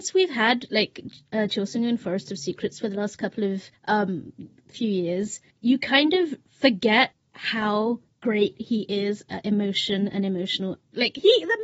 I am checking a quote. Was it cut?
no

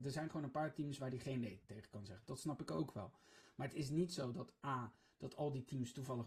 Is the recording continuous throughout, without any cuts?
yes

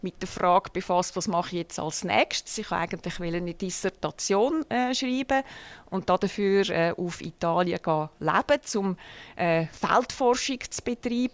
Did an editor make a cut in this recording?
no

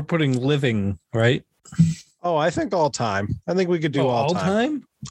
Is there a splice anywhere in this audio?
no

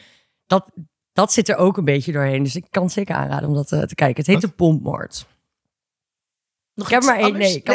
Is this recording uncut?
yes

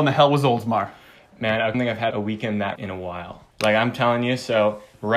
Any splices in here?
yes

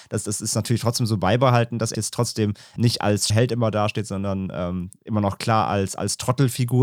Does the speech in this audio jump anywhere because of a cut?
yes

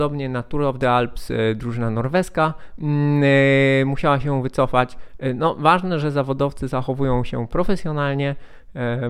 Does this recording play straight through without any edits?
yes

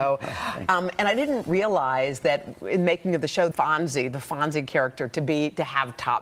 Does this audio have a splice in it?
yes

